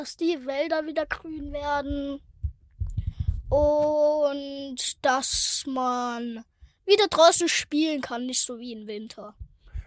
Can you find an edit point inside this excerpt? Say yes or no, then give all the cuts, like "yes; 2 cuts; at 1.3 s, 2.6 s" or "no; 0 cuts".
no; 0 cuts